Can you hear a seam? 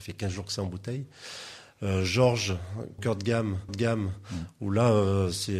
yes; 2 cuts; at 3.0 s, 3.7 s

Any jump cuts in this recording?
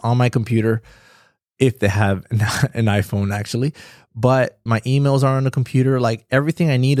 yes; 1 cut; at 4.7 s

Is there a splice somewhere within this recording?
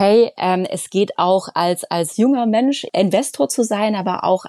no; 0 cuts

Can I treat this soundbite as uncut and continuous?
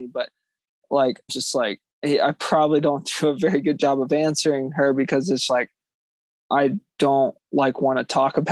no; 3 cuts; at 1.3 s, 1.9 s, 5.5 s

